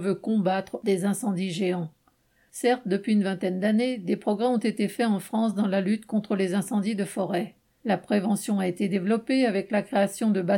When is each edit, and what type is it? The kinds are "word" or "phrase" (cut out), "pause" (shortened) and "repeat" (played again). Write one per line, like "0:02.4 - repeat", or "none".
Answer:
none